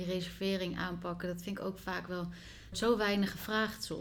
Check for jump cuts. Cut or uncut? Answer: cut